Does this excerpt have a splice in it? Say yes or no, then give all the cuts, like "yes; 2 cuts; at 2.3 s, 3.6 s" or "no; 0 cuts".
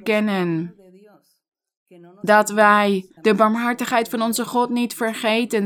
yes; 1 cut; at 3.2 s